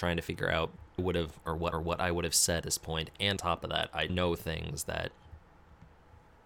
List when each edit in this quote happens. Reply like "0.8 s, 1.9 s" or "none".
1.0 s, 1.7 s, 2.6 s, 3.4 s, 4.1 s